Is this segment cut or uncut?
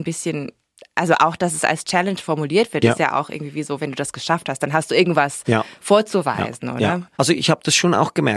cut